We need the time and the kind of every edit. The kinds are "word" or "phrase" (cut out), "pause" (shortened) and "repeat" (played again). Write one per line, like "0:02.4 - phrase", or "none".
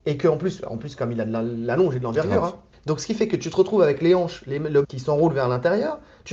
0:02.7 - pause
0:04.8 - word